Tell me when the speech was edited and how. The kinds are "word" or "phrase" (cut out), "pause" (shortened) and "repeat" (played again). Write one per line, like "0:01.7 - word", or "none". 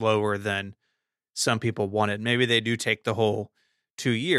none